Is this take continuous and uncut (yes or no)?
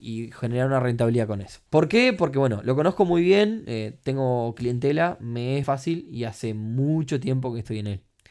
no